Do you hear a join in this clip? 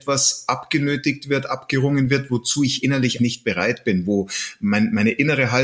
yes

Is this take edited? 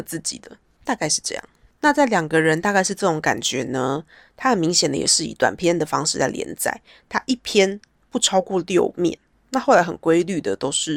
no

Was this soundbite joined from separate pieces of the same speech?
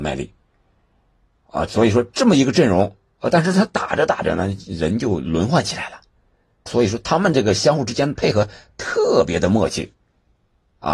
yes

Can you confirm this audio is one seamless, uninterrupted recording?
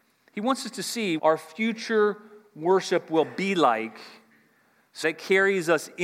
no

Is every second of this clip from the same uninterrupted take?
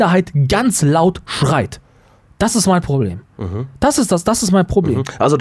yes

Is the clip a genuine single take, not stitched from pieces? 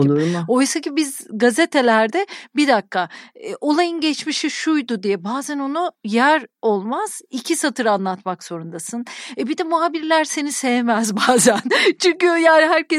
yes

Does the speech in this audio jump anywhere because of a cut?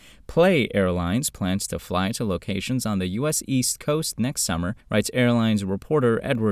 yes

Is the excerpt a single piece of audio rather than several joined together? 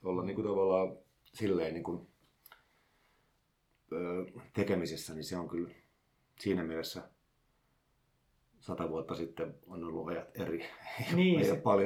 yes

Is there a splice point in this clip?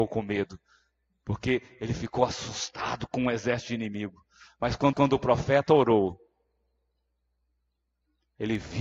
yes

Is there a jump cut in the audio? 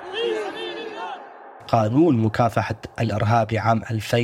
yes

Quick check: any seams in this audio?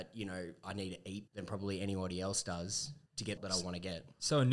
yes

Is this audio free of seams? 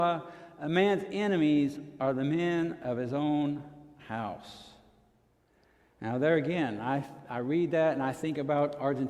yes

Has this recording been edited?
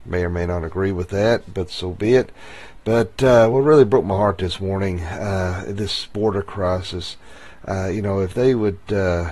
no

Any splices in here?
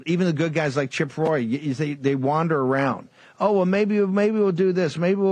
no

